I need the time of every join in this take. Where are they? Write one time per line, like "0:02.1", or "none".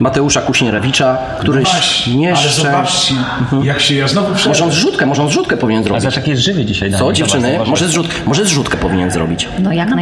0:01.6

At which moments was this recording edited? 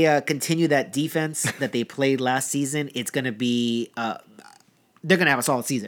none

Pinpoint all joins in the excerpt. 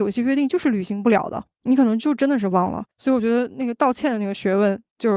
0:01.5
0:02.9

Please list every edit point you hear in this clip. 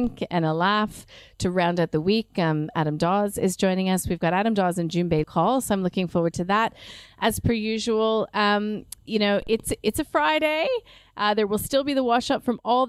0:05.2

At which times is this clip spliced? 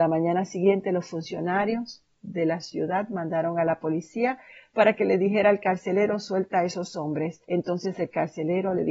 0:07.4

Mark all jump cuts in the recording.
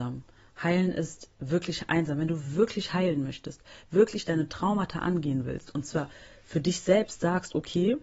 none

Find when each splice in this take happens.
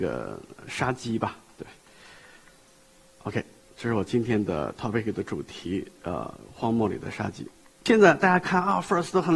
none

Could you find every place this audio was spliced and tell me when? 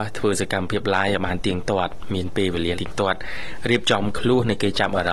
0:02.7

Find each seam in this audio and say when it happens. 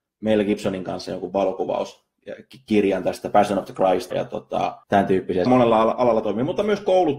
0:04.1
0:04.8
0:05.5

